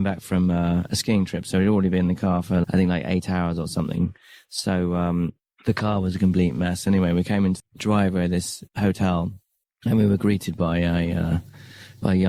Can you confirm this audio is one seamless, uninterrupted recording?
no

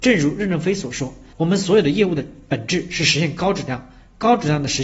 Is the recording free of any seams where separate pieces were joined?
no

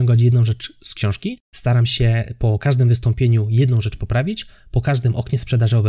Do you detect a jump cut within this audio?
no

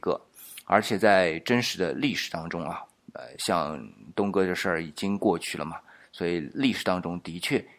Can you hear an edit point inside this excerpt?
no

